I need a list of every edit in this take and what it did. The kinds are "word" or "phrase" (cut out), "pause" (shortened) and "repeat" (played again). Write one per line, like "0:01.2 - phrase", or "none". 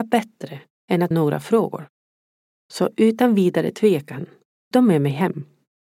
0:01.1 - word
0:04.7 - word